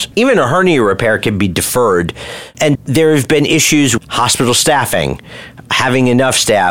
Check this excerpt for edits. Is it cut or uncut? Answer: cut